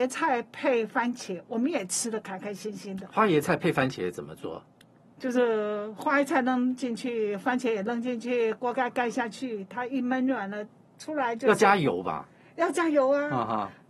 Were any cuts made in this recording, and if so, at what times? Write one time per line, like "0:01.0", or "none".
none